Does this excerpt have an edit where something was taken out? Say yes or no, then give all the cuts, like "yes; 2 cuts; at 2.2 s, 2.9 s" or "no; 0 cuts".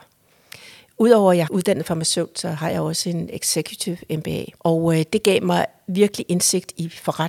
yes; 2 cuts; at 1.5 s, 4.6 s